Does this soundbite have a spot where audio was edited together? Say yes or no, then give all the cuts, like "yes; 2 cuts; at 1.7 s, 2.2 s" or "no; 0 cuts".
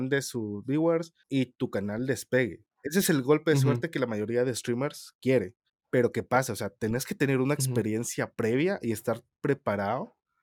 yes; 3 cuts; at 1.2 s, 2.7 s, 5.7 s